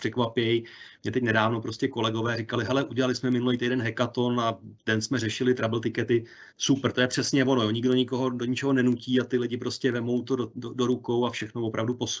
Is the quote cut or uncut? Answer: cut